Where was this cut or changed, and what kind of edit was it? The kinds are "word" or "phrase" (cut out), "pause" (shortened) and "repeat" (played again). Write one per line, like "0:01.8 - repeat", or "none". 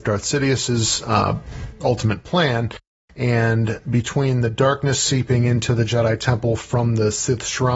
none

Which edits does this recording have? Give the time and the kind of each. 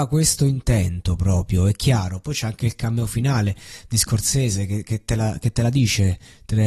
none

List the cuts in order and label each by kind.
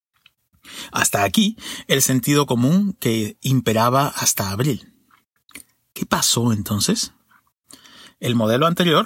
none

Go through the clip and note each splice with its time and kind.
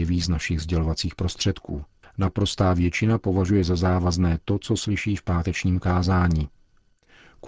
0:02.0 - pause

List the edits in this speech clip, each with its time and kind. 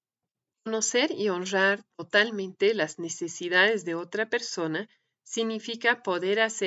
none

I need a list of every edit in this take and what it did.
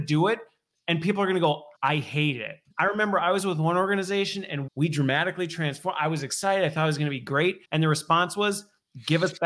0:01.7 - pause
0:02.7 - pause
0:04.7 - word
0:07.6 - pause

